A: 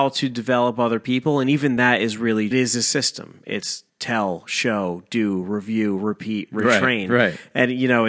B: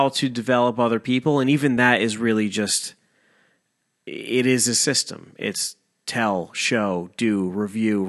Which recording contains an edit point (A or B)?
A